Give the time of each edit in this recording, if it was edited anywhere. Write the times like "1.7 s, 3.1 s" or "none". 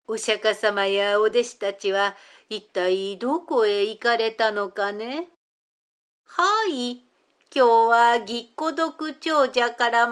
none